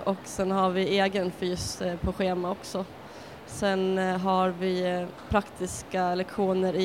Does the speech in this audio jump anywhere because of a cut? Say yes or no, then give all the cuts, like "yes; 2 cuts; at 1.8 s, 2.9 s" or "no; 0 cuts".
no; 0 cuts